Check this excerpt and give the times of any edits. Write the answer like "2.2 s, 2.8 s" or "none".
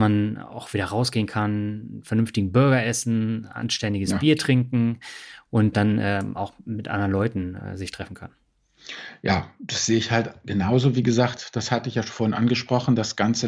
5.7 s